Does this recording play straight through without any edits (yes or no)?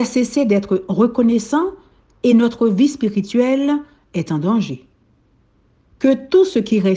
yes